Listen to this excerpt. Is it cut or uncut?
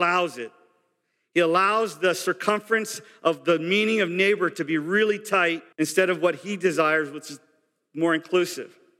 cut